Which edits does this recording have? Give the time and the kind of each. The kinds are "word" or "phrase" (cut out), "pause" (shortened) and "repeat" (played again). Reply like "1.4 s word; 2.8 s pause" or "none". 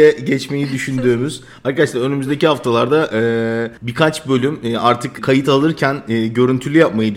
3.8 s pause; 5.2 s word